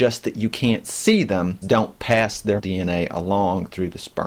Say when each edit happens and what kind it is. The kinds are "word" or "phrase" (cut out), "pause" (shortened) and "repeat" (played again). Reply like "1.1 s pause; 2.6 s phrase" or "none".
1.6 s phrase; 2.6 s word